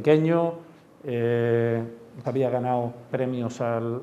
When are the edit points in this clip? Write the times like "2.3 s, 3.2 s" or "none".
2.2 s, 3.1 s